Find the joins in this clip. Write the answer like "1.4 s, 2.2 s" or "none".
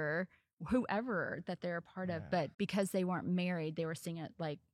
2.5 s